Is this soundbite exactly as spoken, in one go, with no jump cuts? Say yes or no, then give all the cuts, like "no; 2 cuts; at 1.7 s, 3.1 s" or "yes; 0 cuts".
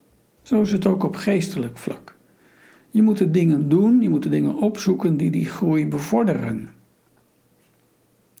yes; 0 cuts